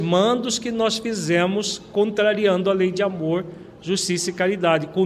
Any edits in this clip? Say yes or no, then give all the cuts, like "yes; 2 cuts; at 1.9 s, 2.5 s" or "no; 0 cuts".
no; 0 cuts